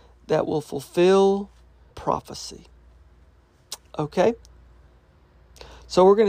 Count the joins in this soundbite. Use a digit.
1